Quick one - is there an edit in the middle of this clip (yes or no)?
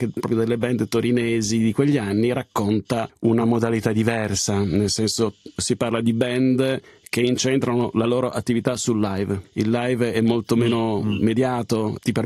no